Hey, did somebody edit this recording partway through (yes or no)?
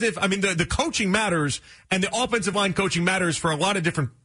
no